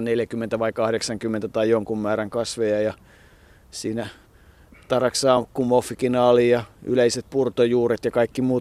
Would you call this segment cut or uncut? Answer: uncut